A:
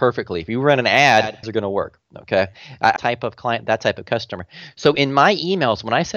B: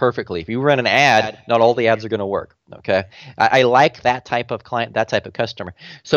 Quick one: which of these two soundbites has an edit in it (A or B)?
A